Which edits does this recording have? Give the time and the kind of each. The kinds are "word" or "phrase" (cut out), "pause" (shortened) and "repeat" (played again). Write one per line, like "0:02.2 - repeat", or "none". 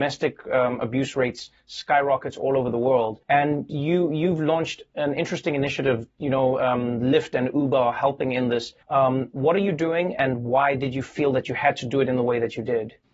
0:03.2 - pause
0:08.8 - pause